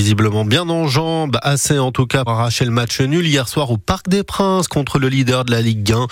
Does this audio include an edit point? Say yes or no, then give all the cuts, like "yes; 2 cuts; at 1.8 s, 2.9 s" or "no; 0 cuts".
yes; 1 cut; at 2.3 s